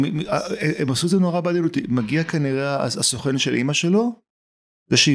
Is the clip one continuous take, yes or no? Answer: yes